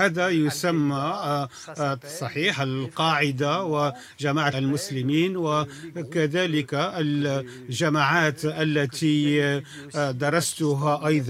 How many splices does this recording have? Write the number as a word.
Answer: one